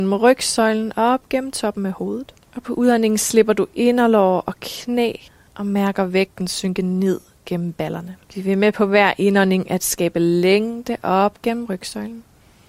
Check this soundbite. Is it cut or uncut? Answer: cut